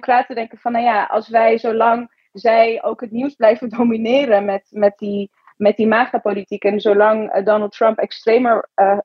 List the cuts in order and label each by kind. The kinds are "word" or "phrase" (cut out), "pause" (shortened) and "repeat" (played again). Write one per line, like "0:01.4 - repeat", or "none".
none